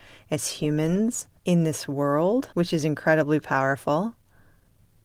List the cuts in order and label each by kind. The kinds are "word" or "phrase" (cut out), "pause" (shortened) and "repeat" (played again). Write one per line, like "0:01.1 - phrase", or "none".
0:01.4 - pause
0:02.5 - pause

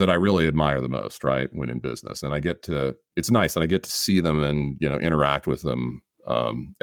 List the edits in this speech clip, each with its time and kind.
none

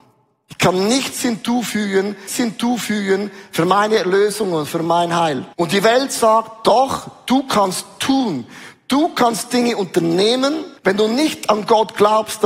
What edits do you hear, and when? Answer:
0:02.3 - repeat
0:05.5 - pause
0:10.8 - pause

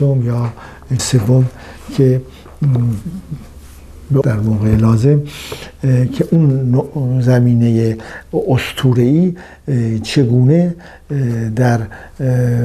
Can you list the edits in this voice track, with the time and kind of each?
0:01.0 - word
0:04.2 - phrase

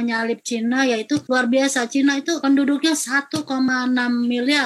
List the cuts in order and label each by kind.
none

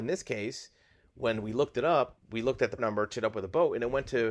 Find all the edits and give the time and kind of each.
0:02.8 - word
0:03.1 - word

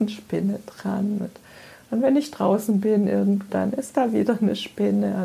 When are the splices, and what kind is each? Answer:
0:03.5 - phrase

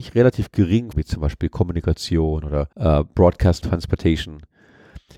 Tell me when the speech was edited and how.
0:00.9 - phrase
0:02.7 - pause
0:03.6 - phrase

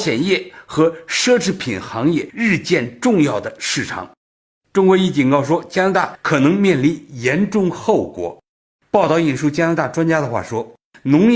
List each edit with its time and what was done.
none

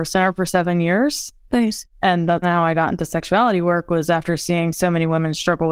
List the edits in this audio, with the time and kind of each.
0:02.4 - word

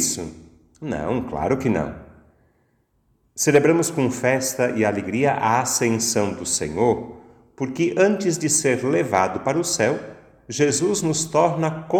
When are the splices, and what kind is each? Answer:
none

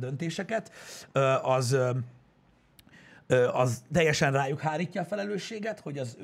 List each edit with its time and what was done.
none

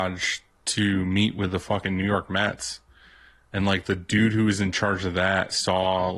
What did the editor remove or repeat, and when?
none

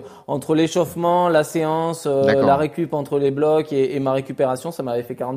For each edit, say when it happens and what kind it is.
none

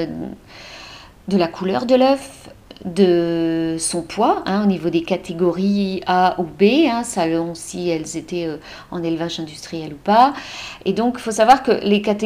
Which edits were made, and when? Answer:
none

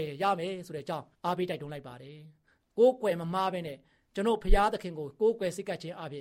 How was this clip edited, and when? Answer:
0:01.1 - pause

